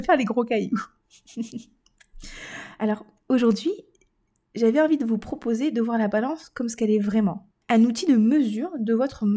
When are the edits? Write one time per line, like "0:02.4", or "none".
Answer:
0:07.6